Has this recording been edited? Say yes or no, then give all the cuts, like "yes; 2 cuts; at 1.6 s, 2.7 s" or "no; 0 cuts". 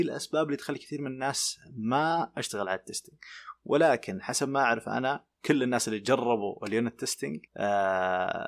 yes; 1 cut; at 7.5 s